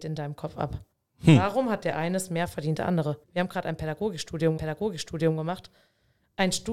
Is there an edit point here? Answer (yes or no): yes